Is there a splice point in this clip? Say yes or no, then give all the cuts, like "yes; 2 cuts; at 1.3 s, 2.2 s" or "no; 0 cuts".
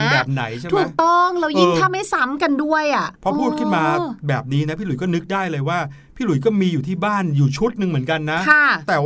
yes; 1 cut; at 3.2 s